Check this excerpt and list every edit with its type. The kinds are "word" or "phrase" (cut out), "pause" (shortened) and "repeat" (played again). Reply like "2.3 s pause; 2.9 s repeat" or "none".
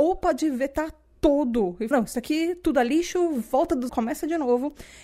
1.9 s word; 3.9 s word